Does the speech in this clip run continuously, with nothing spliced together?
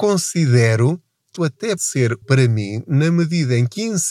no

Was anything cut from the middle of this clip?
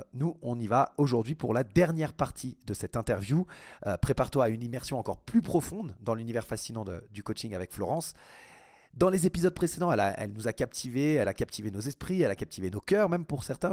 no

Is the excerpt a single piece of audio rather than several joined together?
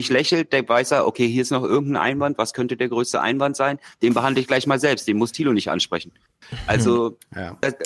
yes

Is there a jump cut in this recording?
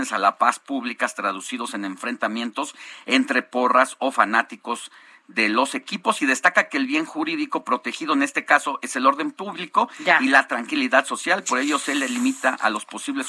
no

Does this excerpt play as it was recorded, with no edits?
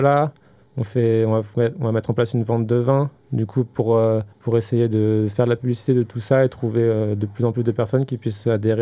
no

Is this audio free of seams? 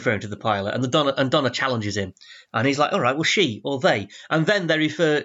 yes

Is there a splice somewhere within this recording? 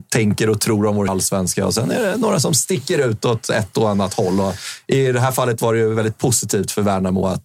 yes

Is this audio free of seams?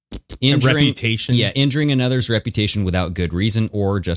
yes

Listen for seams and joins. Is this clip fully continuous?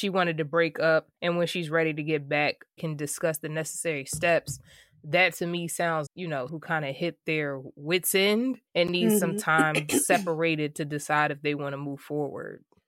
no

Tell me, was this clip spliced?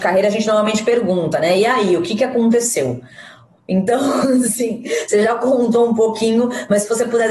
no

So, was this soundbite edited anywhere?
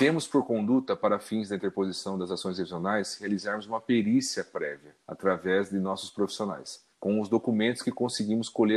yes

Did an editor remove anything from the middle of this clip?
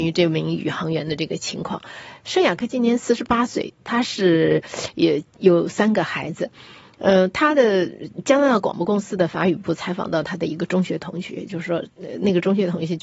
no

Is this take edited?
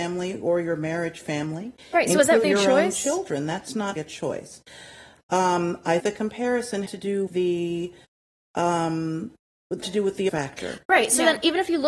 yes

